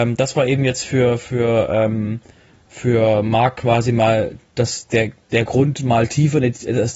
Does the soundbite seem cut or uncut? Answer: uncut